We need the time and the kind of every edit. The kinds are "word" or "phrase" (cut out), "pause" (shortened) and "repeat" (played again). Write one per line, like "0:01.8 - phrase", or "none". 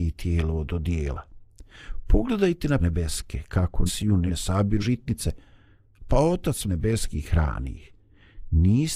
0:02.8 - word
0:03.9 - word
0:04.3 - word
0:04.8 - word
0:06.6 - word